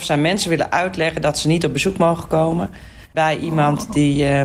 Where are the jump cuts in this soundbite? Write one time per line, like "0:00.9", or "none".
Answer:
none